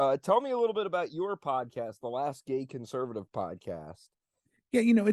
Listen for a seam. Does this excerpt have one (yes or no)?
no